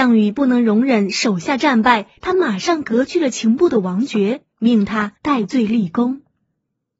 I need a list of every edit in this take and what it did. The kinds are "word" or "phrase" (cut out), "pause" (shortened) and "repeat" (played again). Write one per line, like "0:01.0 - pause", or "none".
0:04.5 - pause
0:05.2 - pause